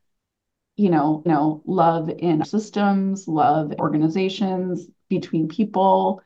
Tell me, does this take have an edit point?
yes; 3 cuts; at 1.3 s, 2.4 s, 3.8 s

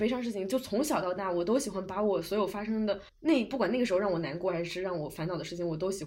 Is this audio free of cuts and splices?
no; 1 cut; at 3.1 s

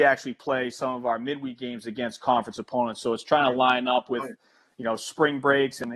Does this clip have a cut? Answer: no; 0 cuts

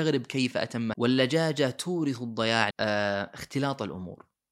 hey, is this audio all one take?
no; 2 cuts; at 0.9 s, 2.7 s

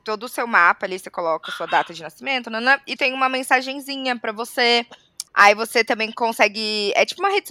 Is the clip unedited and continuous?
no; 2 cuts; at 3.0 s, 5.3 s

